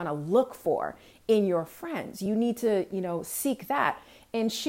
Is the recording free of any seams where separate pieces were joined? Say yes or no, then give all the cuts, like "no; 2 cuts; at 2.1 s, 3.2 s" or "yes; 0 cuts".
yes; 0 cuts